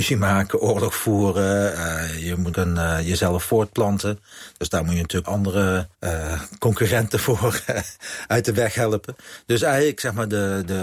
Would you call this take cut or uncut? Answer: cut